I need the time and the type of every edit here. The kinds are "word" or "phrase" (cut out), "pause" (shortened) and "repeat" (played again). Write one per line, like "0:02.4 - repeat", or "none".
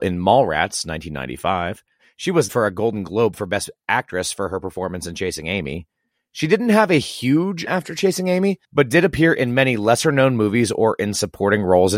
0:02.0 - pause
0:02.5 - word
0:06.1 - pause
0:07.7 - phrase
0:08.6 - pause